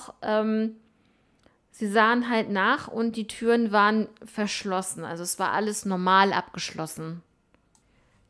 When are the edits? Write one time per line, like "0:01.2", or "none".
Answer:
none